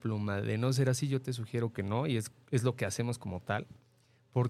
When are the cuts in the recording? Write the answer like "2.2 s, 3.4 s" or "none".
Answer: none